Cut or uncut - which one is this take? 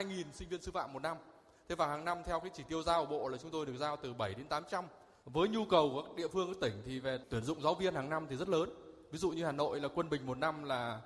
uncut